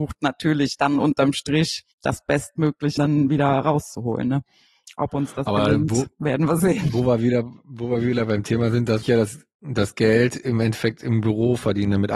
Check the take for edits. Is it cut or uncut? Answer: cut